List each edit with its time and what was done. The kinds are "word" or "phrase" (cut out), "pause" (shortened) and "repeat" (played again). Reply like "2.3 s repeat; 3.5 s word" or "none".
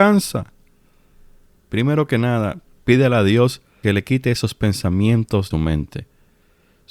3.8 s word; 5.5 s phrase